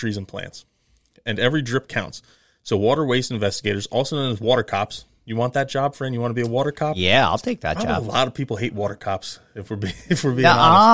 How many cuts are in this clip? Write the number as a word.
zero